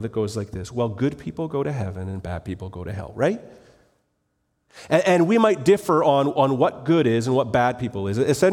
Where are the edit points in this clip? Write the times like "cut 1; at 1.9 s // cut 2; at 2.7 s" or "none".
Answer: none